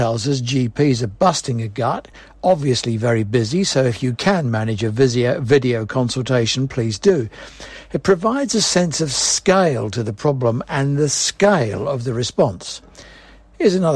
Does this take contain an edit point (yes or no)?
no